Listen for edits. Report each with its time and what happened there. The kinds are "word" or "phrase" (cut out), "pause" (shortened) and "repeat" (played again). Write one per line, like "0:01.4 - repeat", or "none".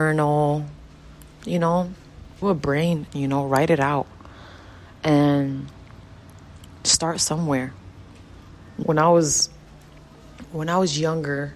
0:02.4 - word
0:03.1 - phrase
0:08.8 - word